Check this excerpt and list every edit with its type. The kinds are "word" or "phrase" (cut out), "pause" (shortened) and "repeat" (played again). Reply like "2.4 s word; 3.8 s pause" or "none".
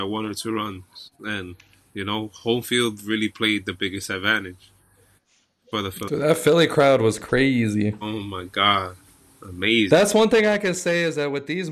none